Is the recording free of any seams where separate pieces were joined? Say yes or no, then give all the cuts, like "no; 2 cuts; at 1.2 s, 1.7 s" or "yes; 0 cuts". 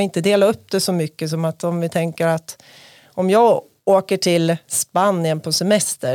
yes; 0 cuts